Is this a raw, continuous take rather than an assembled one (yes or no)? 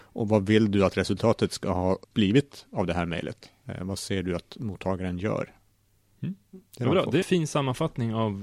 no